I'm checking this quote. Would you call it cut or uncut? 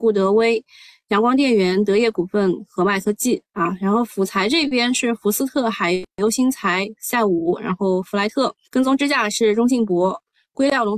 cut